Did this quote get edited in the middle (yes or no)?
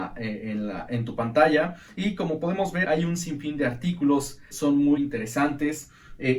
yes